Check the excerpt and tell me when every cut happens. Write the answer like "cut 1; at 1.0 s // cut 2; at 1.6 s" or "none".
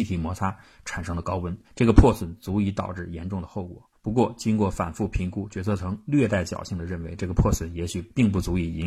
cut 1; at 1.6 s // cut 2; at 3.9 s